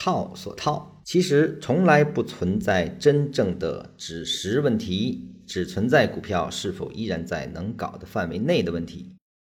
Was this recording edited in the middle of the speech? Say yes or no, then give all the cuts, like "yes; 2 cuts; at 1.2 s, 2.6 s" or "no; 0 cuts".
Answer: yes; 1 cut; at 1.0 s